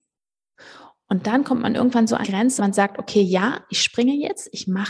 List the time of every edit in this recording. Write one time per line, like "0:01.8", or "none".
0:02.2
0:02.6